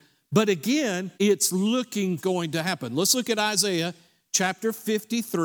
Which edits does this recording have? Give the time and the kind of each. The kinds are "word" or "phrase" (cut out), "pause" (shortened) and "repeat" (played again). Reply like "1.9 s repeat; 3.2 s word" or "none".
1.1 s pause; 2.2 s phrase